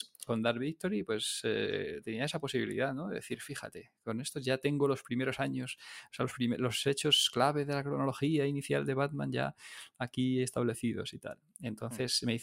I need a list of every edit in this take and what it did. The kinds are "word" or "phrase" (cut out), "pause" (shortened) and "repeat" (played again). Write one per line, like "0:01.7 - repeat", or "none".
none